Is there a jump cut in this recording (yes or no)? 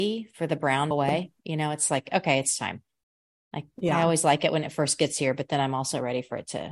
yes